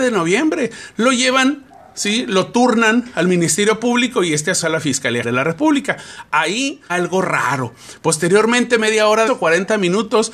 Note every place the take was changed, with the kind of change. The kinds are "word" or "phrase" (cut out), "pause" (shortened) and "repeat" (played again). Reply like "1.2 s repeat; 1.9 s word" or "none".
4.6 s word; 5.2 s word; 6.9 s word; 9.3 s word